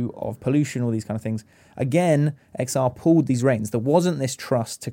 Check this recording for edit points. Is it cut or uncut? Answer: uncut